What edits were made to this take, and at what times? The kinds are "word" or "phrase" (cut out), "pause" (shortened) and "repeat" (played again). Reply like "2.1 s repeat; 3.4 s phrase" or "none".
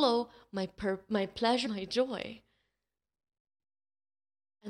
1.7 s word

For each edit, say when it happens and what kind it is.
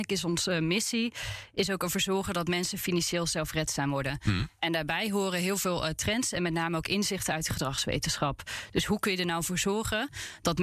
none

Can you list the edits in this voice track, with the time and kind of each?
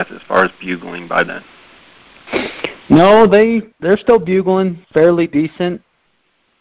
3.7 s pause; 4.8 s pause

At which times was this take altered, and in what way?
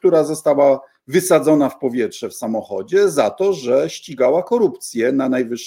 none

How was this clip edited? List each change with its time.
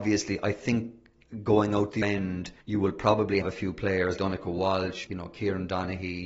2.0 s word; 2.6 s pause; 3.4 s word; 4.2 s word; 5.1 s word

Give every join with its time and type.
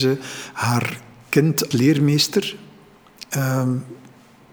1.7 s word

